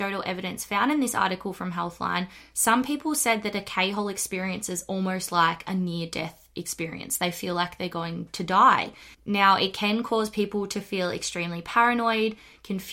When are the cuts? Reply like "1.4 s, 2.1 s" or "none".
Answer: 9.1 s